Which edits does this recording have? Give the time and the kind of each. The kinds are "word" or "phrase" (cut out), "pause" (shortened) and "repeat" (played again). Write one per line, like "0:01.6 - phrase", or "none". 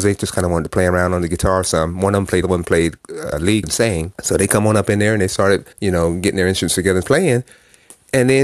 0:02.4 - phrase
0:03.3 - phrase
0:03.6 - word
0:04.1 - pause
0:05.7 - pause
0:07.0 - word

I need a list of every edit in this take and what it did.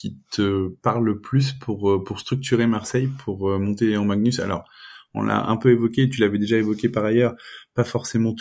none

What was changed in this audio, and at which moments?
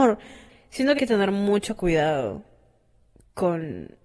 0:01.0 - word

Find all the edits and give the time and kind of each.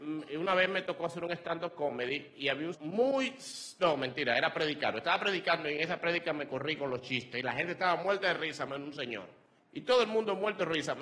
0:02.7 - word
0:09.6 - pause

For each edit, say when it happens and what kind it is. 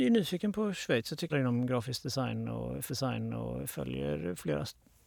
0:01.3 - phrase
0:02.9 - repeat

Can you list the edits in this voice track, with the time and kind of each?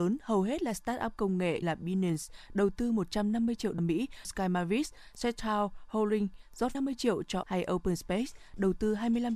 0:01.6 - word
0:03.8 - word
0:04.2 - word
0:06.7 - word
0:07.4 - word

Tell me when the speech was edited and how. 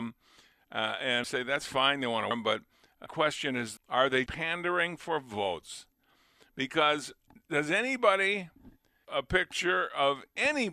0:01.2 - word
0:02.3 - word
0:03.1 - word
0:03.8 - word
0:04.3 - word
0:09.0 - word

